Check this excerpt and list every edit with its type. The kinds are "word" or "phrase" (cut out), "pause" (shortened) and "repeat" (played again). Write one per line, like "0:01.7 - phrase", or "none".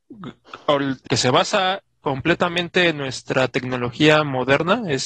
0:01.1 - word